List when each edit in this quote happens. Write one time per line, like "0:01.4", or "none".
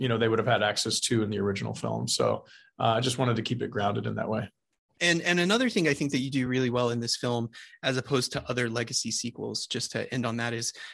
none

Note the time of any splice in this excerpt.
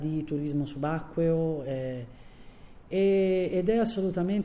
none

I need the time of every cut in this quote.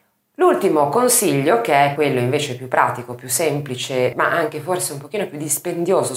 0:02.0
0:04.1

